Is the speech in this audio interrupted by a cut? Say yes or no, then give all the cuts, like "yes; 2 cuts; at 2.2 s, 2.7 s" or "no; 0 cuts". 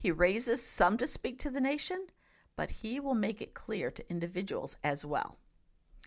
no; 0 cuts